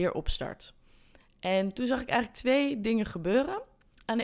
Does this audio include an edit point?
no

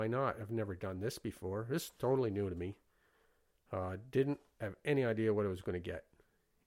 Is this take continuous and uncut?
yes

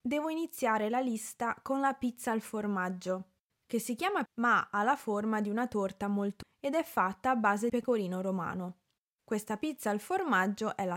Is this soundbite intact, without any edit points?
no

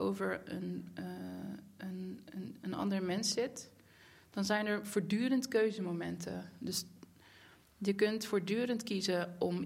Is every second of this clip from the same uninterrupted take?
yes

